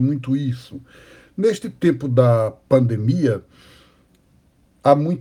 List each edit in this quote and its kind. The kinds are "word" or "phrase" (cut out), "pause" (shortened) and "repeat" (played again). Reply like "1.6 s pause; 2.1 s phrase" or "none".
none